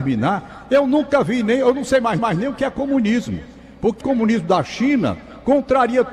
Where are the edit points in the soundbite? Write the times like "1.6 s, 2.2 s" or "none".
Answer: 2.2 s, 4.0 s